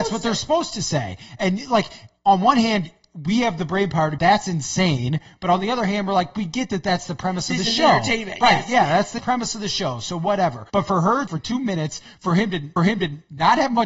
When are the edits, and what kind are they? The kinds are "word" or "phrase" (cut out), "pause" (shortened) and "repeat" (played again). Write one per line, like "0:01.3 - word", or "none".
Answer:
0:04.2 - word
0:09.2 - word
0:10.7 - pause
0:11.3 - phrase
0:12.8 - repeat